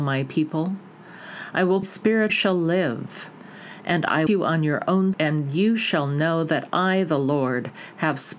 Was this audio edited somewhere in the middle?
yes; 4 cuts; at 1.8 s, 2.3 s, 4.3 s, 5.1 s

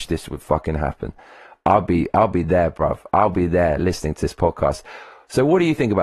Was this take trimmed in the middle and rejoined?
no; 0 cuts

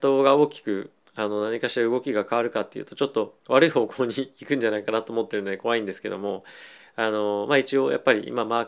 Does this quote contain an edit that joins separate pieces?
yes; 1 cut; at 3.4 s

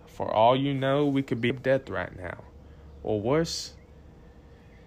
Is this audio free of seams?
no; 1 cut; at 1.5 s

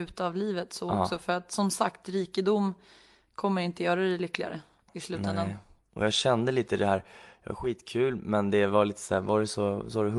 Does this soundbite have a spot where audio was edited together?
no; 0 cuts

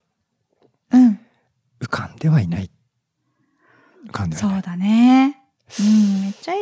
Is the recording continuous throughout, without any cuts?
yes; 0 cuts

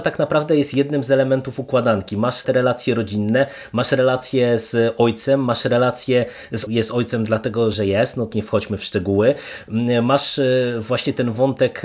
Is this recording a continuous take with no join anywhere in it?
no; 4 cuts; at 2.4 s, 6.7 s, 7.7 s, 8.3 s

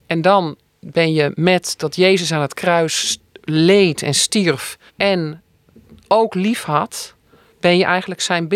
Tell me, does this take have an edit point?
yes; 1 cut; at 4.9 s

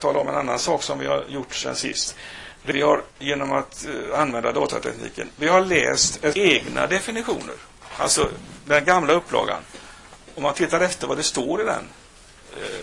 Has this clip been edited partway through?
yes; 3 cuts; at 2.7 s, 3.1 s, 6.3 s

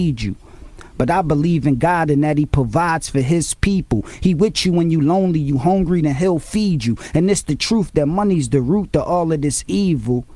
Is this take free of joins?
yes; 0 cuts

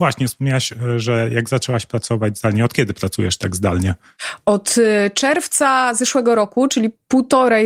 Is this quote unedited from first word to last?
yes; 0 cuts

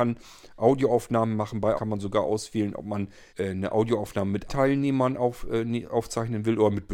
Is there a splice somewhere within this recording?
yes; 3 cuts; at 1.8 s, 3.3 s, 4.5 s

